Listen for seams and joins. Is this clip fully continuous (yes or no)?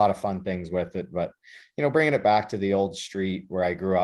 yes